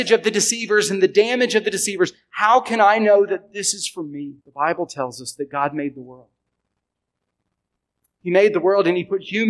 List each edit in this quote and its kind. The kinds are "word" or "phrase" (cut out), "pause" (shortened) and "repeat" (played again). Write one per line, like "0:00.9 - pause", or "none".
0:04.4 - pause